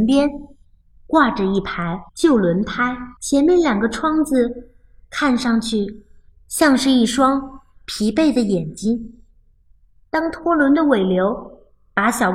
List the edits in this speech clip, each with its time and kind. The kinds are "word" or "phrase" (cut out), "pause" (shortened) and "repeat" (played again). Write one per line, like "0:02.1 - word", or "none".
0:02.1 - pause
0:03.2 - pause

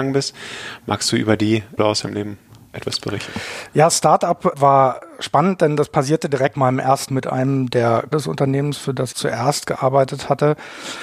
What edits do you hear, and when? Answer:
0:01.8 - word
0:04.5 - word
0:06.5 - word
0:07.1 - word
0:08.1 - word
0:09.1 - word

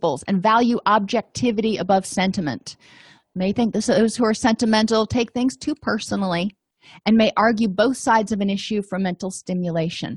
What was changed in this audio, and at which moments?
none

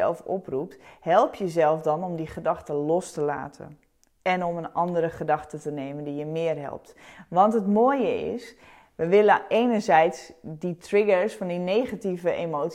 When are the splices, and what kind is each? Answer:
none

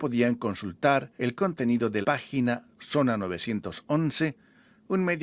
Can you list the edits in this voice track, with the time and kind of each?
0:01.2 - pause
0:02.0 - word
0:02.7 - pause

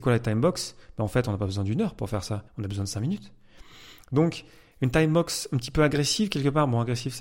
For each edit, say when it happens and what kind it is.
0:02.5 - pause

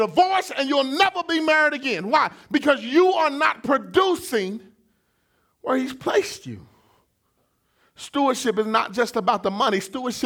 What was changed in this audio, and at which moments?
none

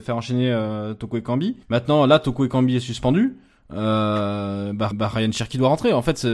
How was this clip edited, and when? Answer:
0:01.6 - pause
0:04.9 - repeat

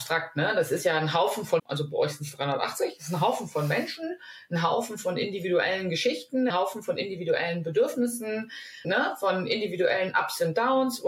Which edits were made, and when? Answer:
0:01.6 - word
0:06.5 - word
0:08.8 - word

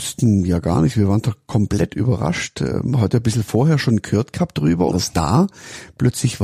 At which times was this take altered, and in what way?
0:04.9 - phrase

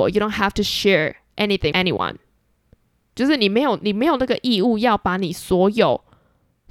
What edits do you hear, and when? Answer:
0:01.7 - word

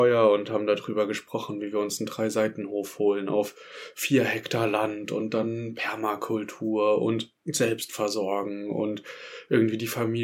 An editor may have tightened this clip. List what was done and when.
0:07.4 - pause

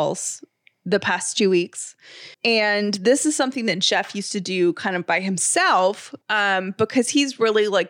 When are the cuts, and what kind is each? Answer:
0:02.3 - pause
0:06.2 - pause

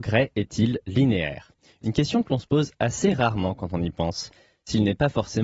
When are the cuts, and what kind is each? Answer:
none

